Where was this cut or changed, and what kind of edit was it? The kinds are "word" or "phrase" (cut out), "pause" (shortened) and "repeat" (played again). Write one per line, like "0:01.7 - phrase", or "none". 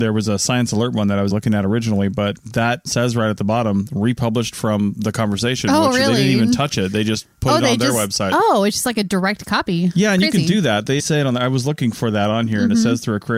0:01.3 - word
0:02.9 - word
0:11.0 - word